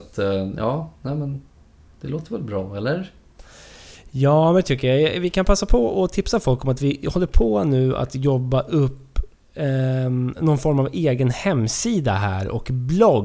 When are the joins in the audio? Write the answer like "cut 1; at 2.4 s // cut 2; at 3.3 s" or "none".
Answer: none